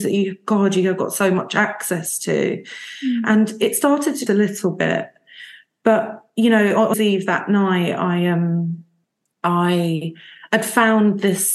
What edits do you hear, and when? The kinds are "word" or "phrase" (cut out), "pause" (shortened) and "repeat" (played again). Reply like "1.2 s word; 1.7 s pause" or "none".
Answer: 4.3 s phrase; 6.3 s pause; 6.9 s phrase; 9.0 s pause

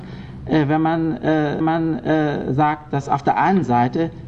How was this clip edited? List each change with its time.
1.6 s repeat

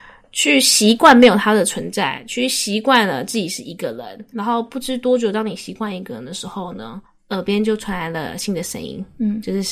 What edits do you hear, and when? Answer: 4.3 s word; 7.1 s pause

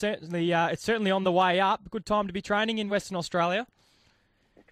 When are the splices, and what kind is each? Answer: none

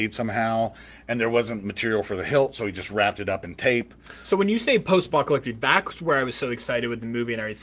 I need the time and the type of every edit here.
none

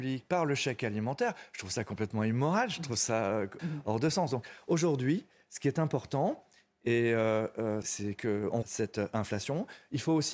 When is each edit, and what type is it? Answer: 3.6 s word; 7.8 s word; 8.6 s word

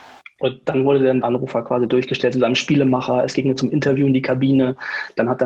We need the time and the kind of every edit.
1.2 s word

